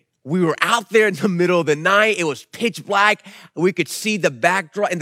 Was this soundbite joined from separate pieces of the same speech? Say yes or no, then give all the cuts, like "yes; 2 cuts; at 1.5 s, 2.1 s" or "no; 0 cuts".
no; 0 cuts